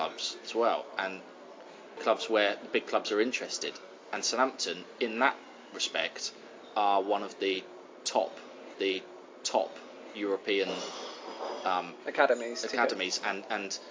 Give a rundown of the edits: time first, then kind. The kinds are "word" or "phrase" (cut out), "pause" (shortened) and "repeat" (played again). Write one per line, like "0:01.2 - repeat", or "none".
0:02.0 - phrase
0:08.7 - repeat